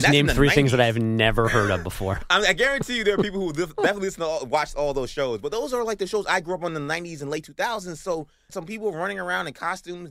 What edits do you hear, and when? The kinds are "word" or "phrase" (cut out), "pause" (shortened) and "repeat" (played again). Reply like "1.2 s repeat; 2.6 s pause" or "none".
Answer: 8.5 s word

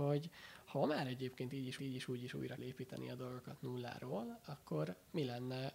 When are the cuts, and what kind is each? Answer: 1.8 s repeat; 2.6 s word

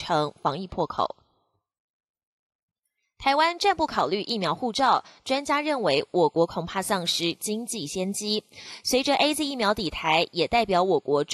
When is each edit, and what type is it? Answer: none

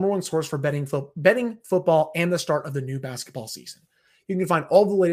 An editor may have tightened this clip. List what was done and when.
none

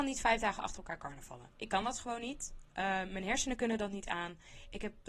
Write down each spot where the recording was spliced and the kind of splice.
none

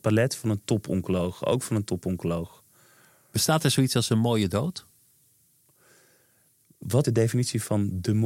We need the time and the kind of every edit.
7.0 s word

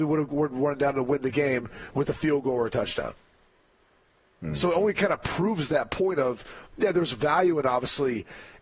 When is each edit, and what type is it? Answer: none

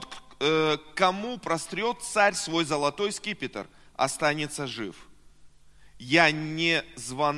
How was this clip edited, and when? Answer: none

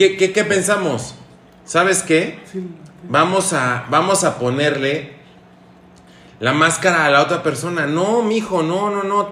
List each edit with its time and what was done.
none

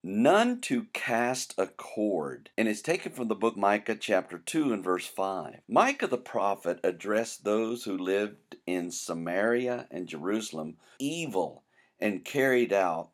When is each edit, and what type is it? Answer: 2.5 s pause; 3.6 s word; 5.6 s pause; 11.0 s phrase

